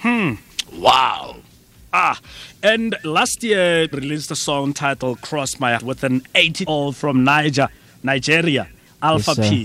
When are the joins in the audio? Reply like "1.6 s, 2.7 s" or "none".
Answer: 3.9 s, 5.8 s, 6.6 s